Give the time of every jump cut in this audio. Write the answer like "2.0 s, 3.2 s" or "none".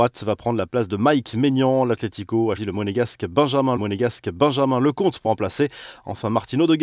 2.6 s, 3.8 s, 5.2 s